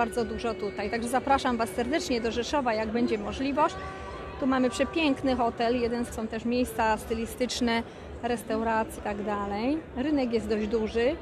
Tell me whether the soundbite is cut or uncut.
cut